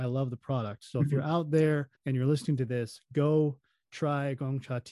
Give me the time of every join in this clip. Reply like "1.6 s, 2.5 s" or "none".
2.0 s